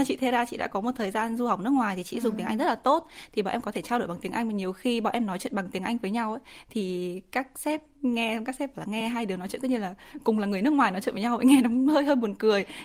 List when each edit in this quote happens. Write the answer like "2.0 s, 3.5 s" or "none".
none